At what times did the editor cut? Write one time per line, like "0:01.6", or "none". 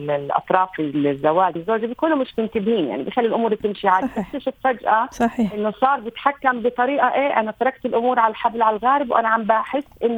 0:01.6